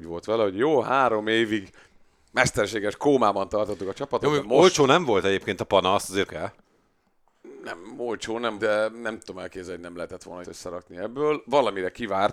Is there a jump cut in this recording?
yes; 3 cuts; at 6.3 s, 8.6 s, 10.4 s

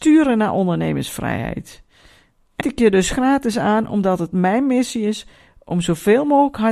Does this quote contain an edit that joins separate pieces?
yes; 1 cut; at 2.6 s

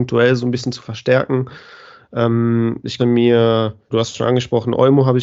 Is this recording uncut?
no; 2 cuts; at 3.0 s, 3.9 s

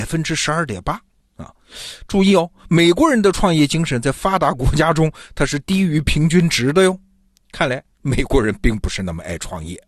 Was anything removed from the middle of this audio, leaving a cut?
no; 0 cuts

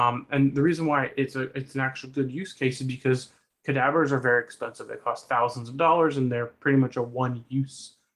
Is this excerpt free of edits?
yes; 0 cuts

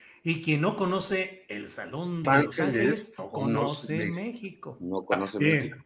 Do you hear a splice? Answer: yes; 2 cuts; at 2.2 s, 3.2 s

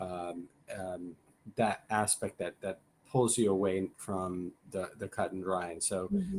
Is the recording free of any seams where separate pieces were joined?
yes; 0 cuts

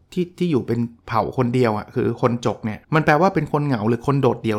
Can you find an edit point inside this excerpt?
yes; 1 cut; at 2.8 s

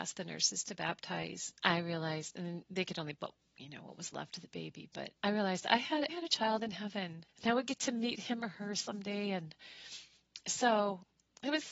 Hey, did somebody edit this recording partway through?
yes; 5 cuts; at 1.6 s, 3.2 s, 5.2 s, 6.1 s, 7.3 s

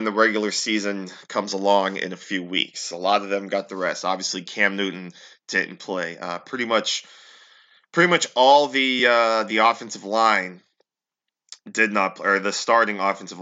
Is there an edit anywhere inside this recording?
no; 0 cuts

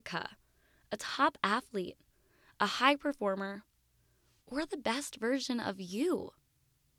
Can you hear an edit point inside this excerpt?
no; 0 cuts

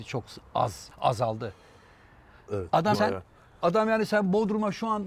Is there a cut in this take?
yes; 2 cuts; at 0.9 s, 2.9 s

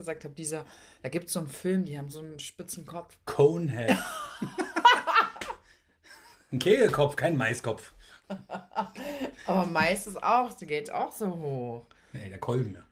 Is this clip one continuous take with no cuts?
yes; 0 cuts

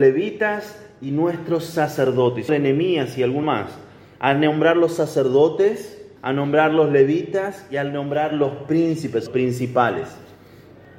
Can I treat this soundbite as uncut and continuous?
no; 4 cuts; at 2.5 s, 3.4 s, 6.2 s, 9.3 s

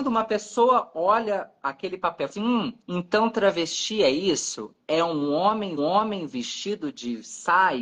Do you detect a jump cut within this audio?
yes; 3 cuts; at 2.3 s, 2.8 s, 5.8 s

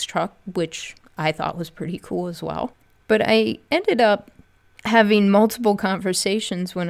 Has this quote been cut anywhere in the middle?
no; 0 cuts

